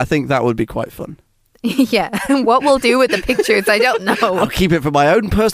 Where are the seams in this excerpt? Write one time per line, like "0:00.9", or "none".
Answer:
none